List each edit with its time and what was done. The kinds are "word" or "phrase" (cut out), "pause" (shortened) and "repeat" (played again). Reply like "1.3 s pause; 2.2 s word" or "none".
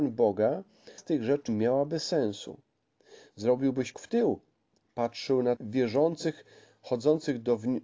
1.0 s word; 1.5 s word; 3.9 s word; 5.6 s word